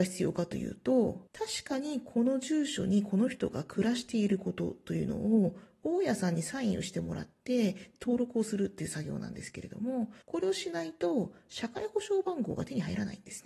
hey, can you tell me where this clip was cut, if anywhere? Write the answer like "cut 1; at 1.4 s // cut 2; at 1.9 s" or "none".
cut 1; at 1.3 s // cut 2; at 10.2 s